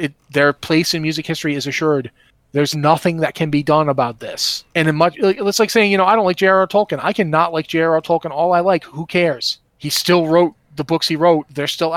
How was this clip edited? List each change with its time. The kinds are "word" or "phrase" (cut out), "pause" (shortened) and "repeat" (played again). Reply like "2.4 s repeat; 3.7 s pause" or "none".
2.7 s word; 4.7 s pause; 9.7 s pause